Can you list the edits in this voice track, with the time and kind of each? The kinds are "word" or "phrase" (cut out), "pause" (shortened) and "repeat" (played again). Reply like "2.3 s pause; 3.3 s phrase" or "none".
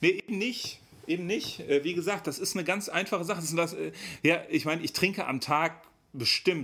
none

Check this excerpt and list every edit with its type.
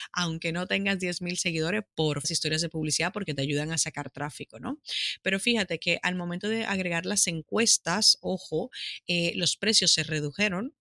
2.2 s phrase

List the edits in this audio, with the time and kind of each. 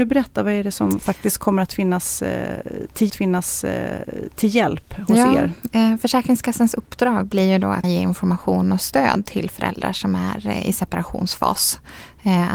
3.1 s repeat; 7.8 s word

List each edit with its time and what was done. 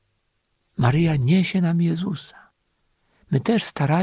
none

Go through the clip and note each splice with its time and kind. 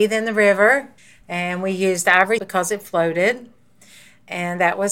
1.0 s pause; 2.4 s word

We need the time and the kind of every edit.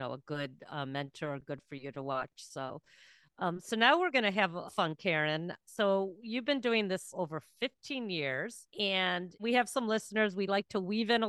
4.7 s word; 7.1 s word; 8.7 s pause

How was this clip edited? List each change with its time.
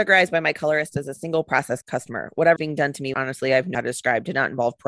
1.8 s word; 2.6 s word; 3.1 s word; 3.7 s word

